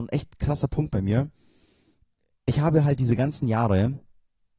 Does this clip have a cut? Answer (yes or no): no